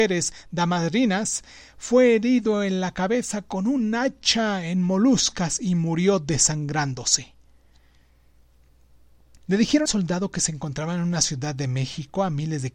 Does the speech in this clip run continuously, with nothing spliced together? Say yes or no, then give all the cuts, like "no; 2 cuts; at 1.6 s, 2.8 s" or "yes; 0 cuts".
no; 1 cut; at 9.9 s